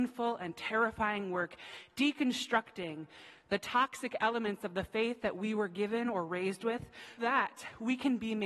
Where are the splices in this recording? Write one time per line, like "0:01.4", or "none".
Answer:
0:07.2